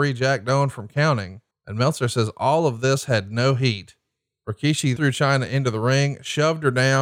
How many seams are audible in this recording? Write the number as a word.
two